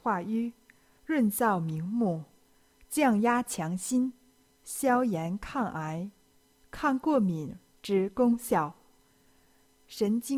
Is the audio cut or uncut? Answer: uncut